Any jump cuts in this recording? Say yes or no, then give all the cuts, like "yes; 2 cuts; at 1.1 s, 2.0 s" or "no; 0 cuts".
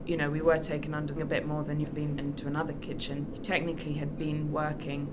yes; 4 cuts; at 1.2 s, 1.8 s, 2.2 s, 3.3 s